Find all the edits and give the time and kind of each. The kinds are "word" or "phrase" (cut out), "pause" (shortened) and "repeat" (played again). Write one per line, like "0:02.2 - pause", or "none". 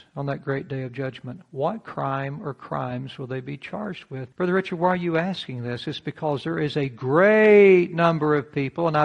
0:04.3 - pause